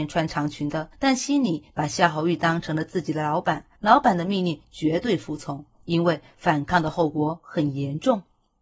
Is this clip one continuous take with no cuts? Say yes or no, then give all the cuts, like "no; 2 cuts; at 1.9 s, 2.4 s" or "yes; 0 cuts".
no; 2 cuts; at 0.9 s, 3.8 s